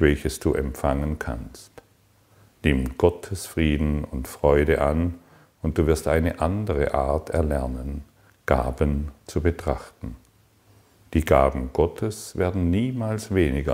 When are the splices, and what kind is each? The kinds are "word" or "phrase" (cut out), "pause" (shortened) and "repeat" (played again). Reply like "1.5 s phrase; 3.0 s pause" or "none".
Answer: none